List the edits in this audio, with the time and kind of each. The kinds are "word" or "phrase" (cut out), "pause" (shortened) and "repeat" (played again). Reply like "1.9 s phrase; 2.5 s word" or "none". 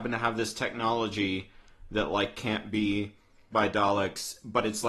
3.5 s word